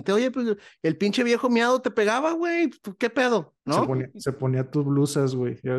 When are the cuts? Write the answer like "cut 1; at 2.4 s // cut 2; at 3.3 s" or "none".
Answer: cut 1; at 3.6 s